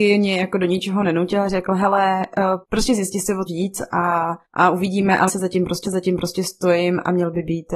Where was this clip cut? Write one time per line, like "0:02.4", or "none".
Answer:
0:02.6
0:03.5
0:04.4
0:05.3
0:05.8